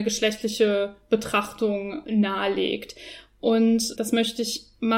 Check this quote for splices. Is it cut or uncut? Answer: cut